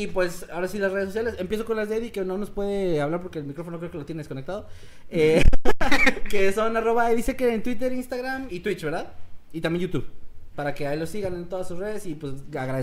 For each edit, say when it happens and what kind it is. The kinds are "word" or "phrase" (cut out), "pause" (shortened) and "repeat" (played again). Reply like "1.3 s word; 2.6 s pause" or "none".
8.5 s word